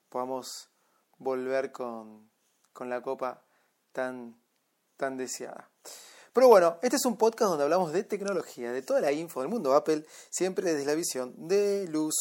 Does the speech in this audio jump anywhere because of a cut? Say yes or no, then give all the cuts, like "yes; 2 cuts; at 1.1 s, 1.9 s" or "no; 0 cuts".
no; 0 cuts